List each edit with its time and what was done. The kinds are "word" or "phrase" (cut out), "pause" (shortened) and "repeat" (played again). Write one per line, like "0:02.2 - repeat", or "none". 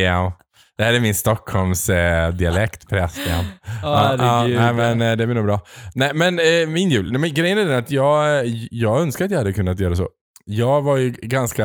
0:10.2 - pause